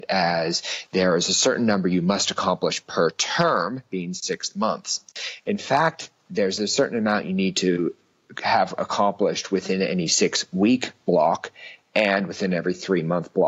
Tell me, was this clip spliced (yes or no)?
no